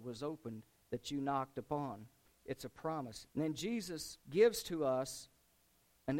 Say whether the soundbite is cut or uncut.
cut